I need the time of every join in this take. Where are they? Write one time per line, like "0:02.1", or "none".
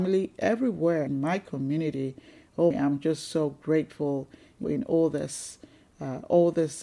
0:01.1
0:02.7
0:04.6